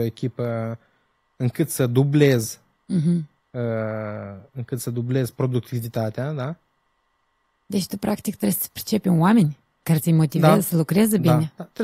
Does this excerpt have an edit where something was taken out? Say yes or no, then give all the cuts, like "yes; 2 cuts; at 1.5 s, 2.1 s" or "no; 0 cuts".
no; 0 cuts